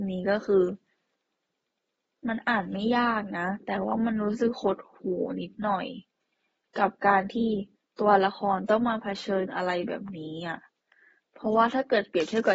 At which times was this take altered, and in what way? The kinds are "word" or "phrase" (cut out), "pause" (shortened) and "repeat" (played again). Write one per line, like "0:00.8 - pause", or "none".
none